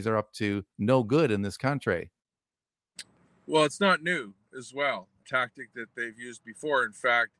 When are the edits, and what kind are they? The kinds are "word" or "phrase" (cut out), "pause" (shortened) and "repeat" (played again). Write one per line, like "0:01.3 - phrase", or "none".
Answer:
0:05.2 - phrase